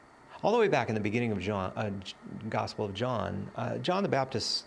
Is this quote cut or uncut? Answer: uncut